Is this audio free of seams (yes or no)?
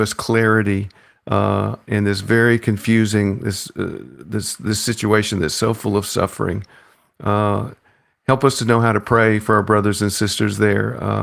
yes